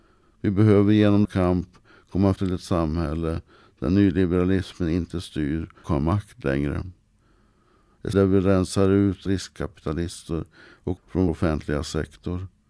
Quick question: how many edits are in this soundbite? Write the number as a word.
seven